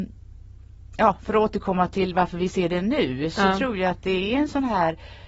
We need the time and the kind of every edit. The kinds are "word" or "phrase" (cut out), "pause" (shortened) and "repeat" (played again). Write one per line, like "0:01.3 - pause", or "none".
none